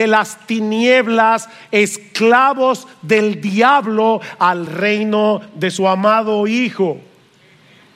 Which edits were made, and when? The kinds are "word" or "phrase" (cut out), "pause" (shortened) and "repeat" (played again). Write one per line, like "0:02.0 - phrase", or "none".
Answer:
none

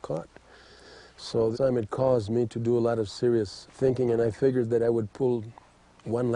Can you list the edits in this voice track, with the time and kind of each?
0:01.5 - word
0:03.7 - word

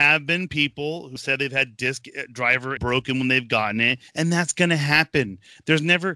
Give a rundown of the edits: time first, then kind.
0:01.2 - word
0:02.8 - phrase
0:04.1 - pause

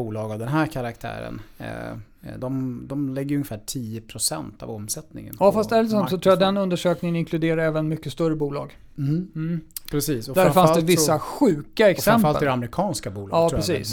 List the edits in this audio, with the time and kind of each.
0:02.4 - word

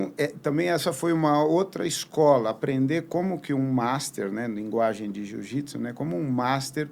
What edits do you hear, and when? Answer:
none

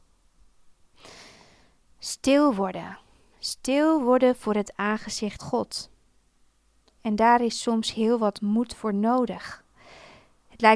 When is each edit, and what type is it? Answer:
0:05.4 - word

